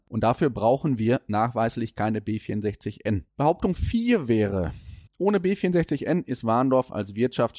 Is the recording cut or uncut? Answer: cut